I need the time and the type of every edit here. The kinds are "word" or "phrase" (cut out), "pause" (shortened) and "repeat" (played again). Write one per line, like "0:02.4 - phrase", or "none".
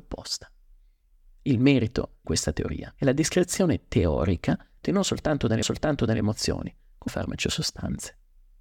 0:02.2 - word
0:03.0 - pause
0:04.8 - phrase
0:05.6 - repeat
0:07.1 - word